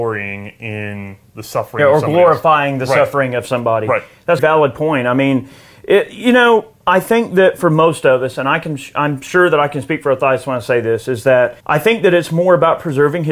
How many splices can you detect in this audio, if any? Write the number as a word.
two